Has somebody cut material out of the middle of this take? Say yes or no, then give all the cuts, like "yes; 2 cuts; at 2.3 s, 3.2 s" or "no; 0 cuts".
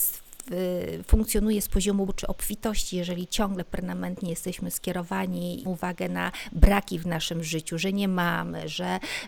yes; 2 cuts; at 2.1 s, 5.7 s